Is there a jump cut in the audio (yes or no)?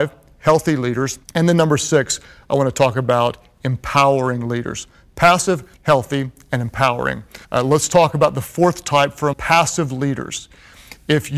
yes